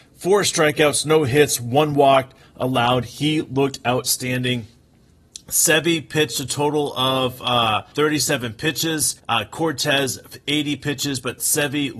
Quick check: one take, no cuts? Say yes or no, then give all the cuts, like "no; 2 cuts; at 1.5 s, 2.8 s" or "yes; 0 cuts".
no; 2 cuts; at 7.9 s, 9.2 s